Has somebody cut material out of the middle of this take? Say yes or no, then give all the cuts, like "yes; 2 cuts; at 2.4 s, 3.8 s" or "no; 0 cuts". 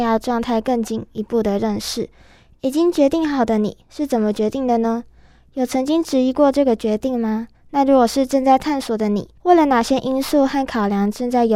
yes; 2 cuts; at 7.5 s, 9.4 s